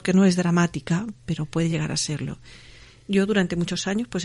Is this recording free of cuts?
yes; 0 cuts

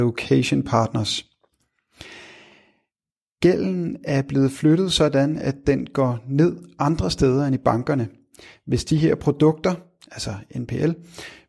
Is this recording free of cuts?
yes; 0 cuts

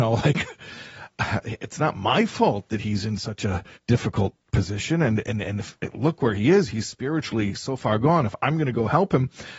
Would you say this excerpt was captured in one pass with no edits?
no; 1 cut; at 3.7 s

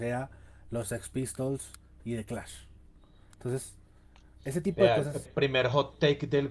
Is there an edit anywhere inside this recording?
yes; 1 cut; at 5.3 s

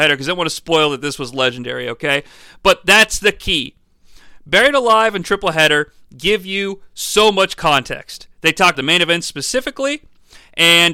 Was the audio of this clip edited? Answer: yes; 1 cut; at 8.7 s

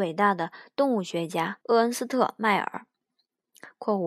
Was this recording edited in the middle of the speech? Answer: yes; 1 cut; at 1.6 s

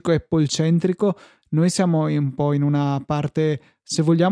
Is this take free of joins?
yes; 0 cuts

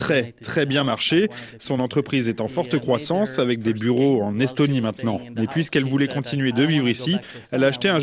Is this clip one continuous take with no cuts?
yes; 0 cuts

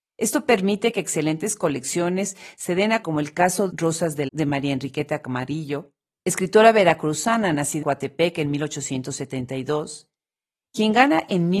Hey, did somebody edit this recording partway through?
yes; 4 cuts; at 3.0 s, 3.7 s, 4.3 s, 7.8 s

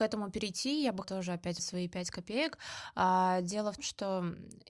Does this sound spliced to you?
yes; 3 cuts; at 1.0 s, 1.6 s, 3.8 s

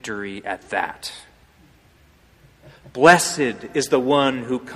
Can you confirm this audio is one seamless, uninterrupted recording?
yes; 0 cuts

